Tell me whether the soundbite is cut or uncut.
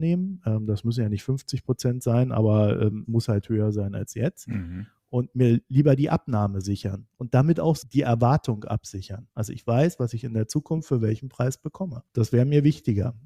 cut